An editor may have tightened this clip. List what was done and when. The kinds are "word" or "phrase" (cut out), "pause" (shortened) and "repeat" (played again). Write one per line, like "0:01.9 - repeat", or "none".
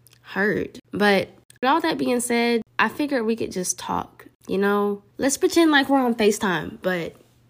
0:05.1 - pause

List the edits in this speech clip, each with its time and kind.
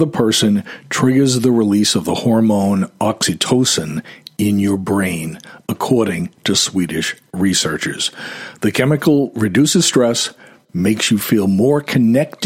none

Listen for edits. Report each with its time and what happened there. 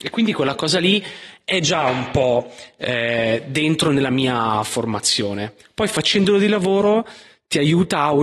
none

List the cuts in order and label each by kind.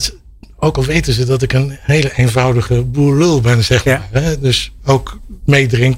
0:04.8 - word

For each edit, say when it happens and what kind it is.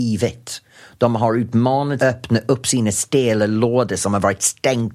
0:02.0 - phrase

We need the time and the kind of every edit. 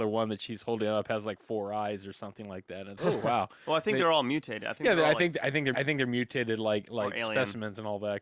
0:03.0 - word
0:05.7 - repeat

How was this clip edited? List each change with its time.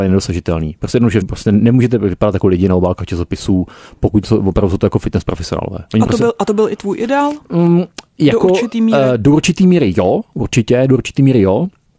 0:01.2 - word

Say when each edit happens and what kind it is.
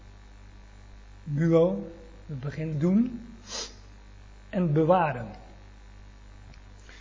0:02.7 - phrase

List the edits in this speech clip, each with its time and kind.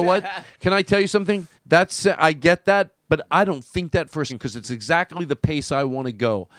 0:01.6 - pause
0:04.3 - word

